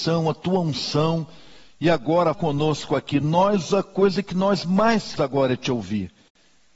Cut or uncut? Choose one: cut